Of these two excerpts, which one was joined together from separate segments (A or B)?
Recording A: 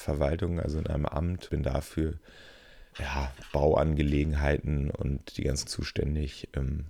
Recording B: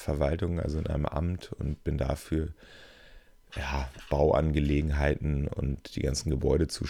A